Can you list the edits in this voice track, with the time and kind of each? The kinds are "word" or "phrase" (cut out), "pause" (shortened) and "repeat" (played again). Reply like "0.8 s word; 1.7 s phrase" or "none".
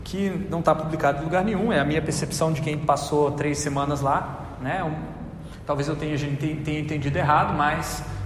none